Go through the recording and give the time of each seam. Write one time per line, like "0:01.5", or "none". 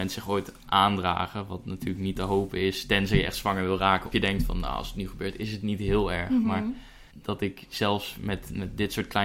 0:04.1
0:07.1